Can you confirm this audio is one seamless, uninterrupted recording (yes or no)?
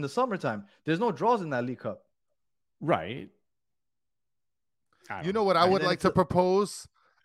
yes